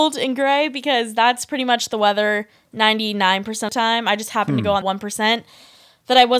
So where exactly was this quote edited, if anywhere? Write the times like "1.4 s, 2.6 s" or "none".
3.7 s, 4.8 s